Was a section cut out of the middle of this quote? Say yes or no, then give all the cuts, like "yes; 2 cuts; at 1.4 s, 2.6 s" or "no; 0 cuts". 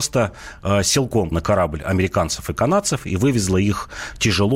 yes; 1 cut; at 1.3 s